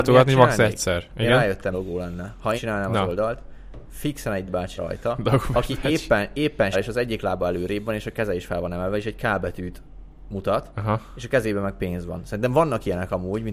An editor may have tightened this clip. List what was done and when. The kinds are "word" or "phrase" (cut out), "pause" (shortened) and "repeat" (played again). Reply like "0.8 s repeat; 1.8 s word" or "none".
1.7 s word; 2.6 s word; 4.5 s word; 4.8 s word; 6.7 s word